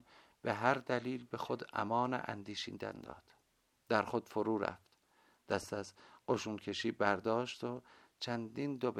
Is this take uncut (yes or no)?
yes